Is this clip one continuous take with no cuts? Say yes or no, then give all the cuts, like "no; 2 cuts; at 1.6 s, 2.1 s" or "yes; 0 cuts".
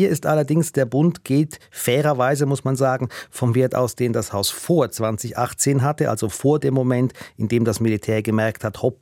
yes; 0 cuts